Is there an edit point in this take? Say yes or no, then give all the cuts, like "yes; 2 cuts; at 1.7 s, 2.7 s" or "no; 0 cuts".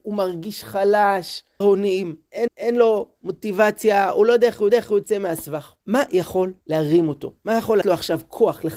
yes; 6 cuts; at 1.6 s, 2.5 s, 4.7 s, 5.8 s, 6.6 s, 7.8 s